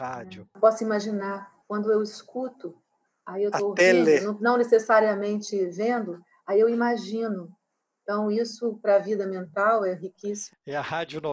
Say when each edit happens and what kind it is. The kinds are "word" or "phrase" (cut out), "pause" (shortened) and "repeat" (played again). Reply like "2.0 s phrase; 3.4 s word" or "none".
none